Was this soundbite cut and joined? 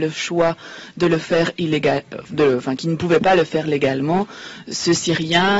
no; 0 cuts

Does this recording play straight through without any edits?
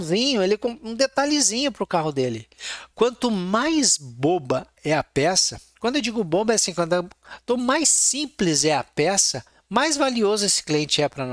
yes; 0 cuts

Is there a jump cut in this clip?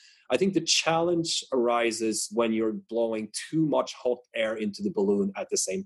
no; 0 cuts

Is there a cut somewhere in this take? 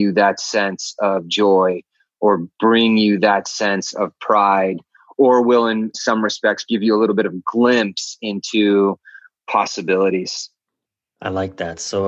yes; 1 cut; at 6.7 s

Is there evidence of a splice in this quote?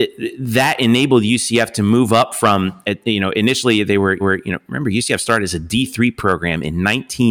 yes; 1 cut; at 4.2 s

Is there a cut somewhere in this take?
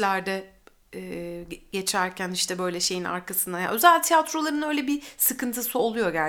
no; 0 cuts

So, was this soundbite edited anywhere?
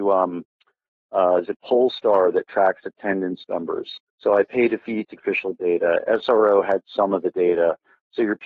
yes; 2 cuts; at 4.1 s, 5.2 s

